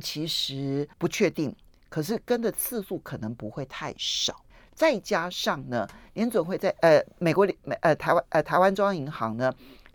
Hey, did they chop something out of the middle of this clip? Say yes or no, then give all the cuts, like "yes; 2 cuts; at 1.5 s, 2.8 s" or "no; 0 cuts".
yes; 2 cuts; at 0.9 s, 4.5 s